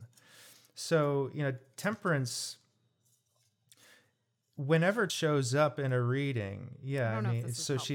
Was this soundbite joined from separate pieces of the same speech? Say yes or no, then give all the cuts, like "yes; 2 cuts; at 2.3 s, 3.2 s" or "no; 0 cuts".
yes; 1 cut; at 5.1 s